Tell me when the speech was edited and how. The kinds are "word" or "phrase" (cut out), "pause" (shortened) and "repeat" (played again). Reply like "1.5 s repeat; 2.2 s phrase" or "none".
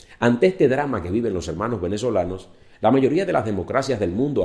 none